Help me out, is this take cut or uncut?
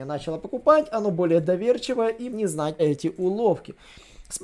cut